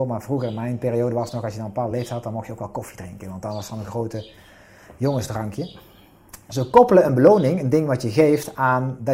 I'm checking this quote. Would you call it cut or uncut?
uncut